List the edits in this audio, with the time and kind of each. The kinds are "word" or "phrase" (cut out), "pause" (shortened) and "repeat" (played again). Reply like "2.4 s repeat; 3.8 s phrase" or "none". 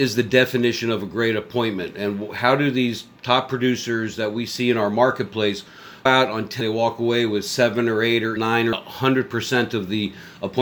3.2 s pause; 6.1 s word; 6.6 s phrase; 8.4 s word; 8.7 s word